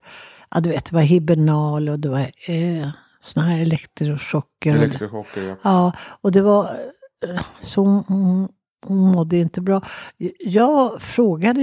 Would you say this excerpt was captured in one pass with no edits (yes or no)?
yes